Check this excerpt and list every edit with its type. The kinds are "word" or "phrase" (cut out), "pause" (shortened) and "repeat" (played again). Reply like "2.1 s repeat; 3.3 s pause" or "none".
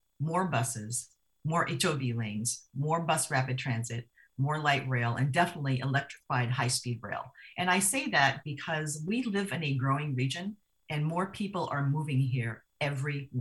none